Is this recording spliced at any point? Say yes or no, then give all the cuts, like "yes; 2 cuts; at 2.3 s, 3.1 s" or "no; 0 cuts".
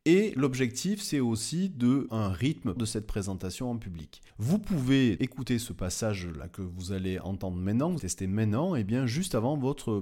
yes; 5 cuts; at 2.1 s, 2.8 s, 4.3 s, 5.2 s, 8.0 s